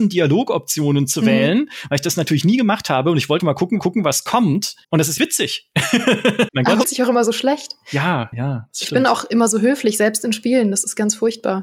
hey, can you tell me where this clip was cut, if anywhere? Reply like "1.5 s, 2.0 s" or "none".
3.4 s, 3.8 s, 4.8 s, 5.2 s, 6.5 s, 6.8 s, 8.3 s